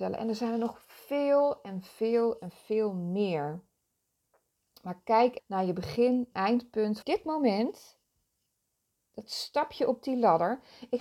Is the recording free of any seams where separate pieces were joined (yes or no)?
no